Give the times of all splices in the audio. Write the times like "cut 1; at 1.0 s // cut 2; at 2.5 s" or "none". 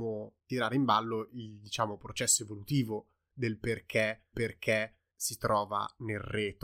cut 1; at 4.3 s